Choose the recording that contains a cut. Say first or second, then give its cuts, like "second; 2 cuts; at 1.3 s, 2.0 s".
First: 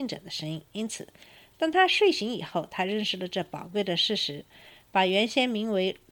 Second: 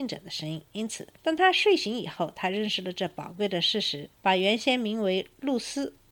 second; 2 cuts; at 1.2 s, 4.1 s